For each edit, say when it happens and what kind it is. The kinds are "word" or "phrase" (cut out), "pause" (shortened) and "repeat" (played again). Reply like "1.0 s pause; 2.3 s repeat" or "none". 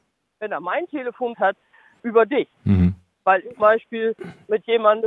1.3 s word; 2.0 s word; 2.5 s pause; 3.6 s word

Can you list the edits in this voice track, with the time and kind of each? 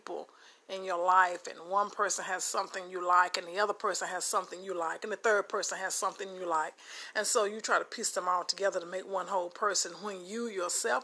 none

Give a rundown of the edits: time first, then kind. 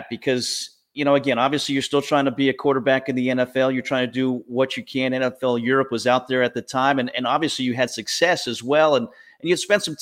none

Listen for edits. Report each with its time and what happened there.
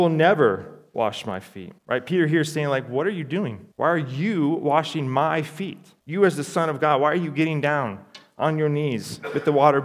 1.8 s pause; 3.7 s pause; 6.0 s pause

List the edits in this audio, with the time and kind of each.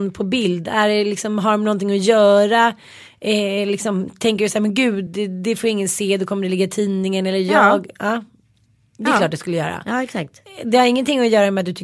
none

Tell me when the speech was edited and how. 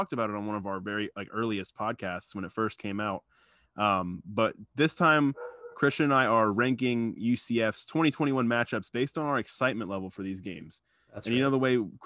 none

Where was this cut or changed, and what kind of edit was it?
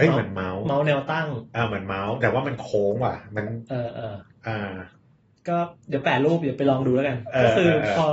none

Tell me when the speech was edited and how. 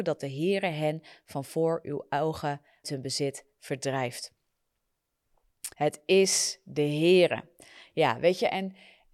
2.8 s word; 5.7 s pause

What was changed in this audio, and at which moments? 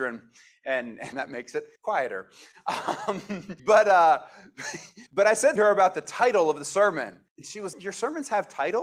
1.1 s phrase; 1.8 s pause; 3.6 s pause; 5.1 s pause; 5.6 s word; 7.3 s pause; 7.7 s word

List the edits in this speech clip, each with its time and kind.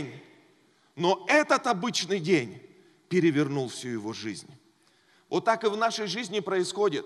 none

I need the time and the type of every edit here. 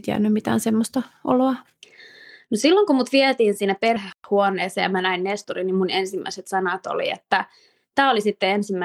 none

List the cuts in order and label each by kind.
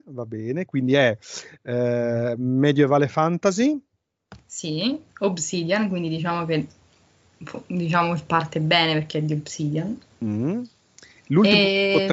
4.4 s pause; 10.1 s pause

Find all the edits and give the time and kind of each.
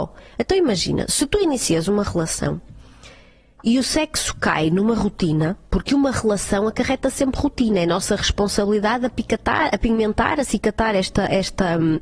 none

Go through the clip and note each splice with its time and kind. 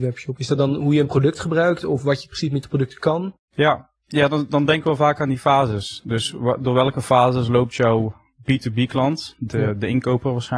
3.4 s pause

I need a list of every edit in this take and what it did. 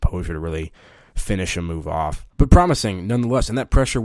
2.3 s pause

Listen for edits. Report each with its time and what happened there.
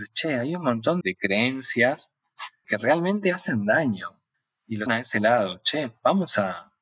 1.0 s word; 2.6 s word; 4.3 s pause; 4.9 s phrase

